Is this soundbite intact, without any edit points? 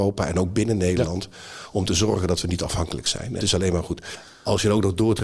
no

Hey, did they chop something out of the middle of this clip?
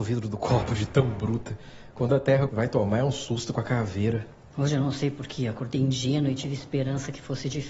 yes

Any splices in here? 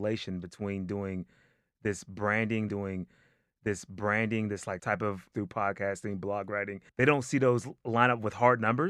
yes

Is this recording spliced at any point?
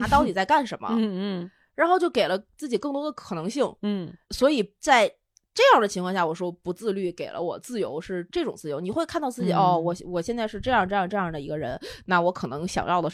yes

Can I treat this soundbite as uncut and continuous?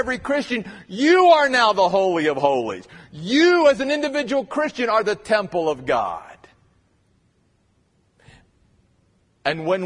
yes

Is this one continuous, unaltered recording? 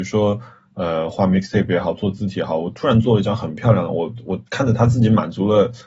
no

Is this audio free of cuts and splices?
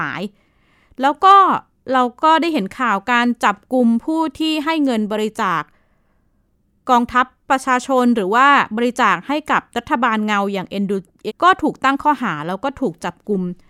no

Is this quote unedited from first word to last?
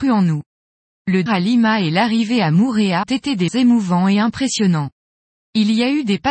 no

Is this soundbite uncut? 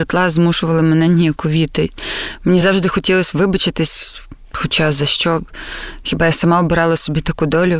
yes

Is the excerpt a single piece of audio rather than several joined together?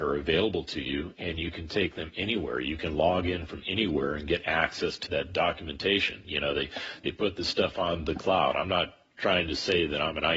no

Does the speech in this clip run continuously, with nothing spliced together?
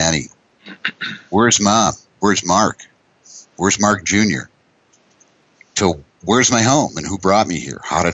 yes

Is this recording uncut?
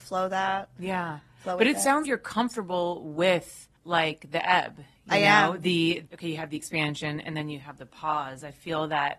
no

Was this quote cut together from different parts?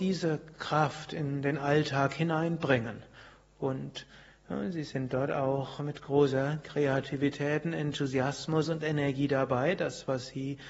no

